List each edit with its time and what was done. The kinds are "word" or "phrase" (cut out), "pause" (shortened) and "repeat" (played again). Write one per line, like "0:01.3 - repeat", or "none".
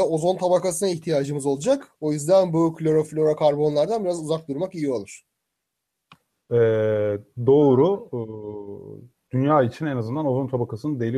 none